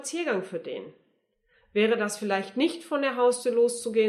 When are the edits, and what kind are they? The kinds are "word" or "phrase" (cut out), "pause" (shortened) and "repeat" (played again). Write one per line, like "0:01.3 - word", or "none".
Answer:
none